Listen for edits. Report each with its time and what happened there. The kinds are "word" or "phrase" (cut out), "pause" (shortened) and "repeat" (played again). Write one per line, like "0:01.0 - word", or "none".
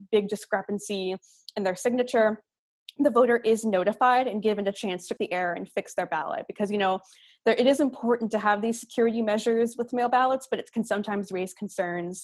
0:05.2 - word